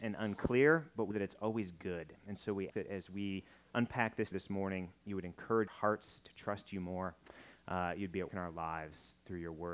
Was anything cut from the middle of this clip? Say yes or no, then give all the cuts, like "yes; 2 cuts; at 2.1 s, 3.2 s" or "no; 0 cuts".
yes; 5 cuts; at 1.1 s, 2.7 s, 4.3 s, 5.7 s, 8.3 s